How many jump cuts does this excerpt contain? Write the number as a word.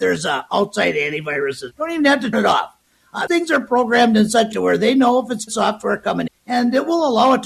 six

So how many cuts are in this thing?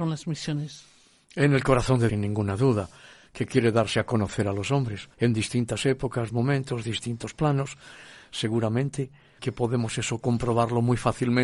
four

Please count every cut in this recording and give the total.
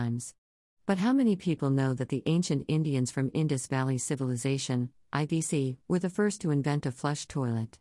one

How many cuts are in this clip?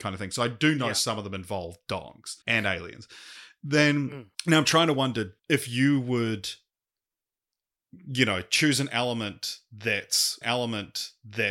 four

